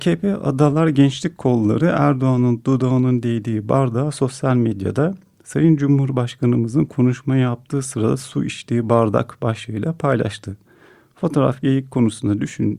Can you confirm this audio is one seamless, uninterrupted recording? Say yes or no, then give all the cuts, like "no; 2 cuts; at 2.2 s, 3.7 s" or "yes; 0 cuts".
yes; 0 cuts